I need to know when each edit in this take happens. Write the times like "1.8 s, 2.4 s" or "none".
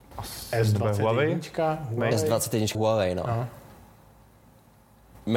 2.7 s